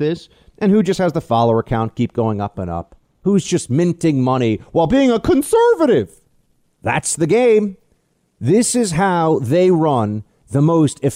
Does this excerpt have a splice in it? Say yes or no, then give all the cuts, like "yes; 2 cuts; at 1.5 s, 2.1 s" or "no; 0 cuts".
no; 0 cuts